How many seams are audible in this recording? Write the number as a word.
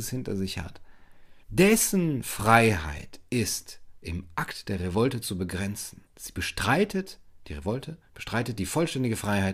two